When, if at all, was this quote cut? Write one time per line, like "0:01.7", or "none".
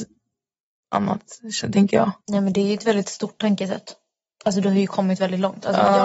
0:02.2